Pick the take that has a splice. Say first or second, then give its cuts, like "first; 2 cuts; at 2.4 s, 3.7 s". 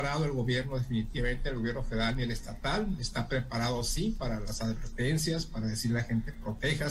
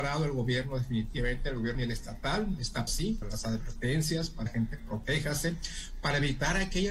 second; 4 cuts; at 1.7 s, 2.9 s, 3.2 s, 4.5 s